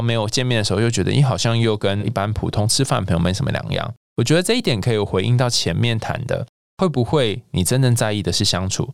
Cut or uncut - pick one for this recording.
uncut